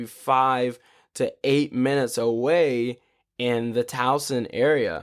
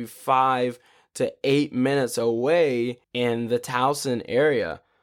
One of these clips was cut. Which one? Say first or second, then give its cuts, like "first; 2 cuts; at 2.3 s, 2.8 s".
second; 1 cut; at 3.0 s